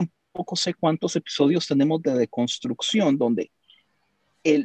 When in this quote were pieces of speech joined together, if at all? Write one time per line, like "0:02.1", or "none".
none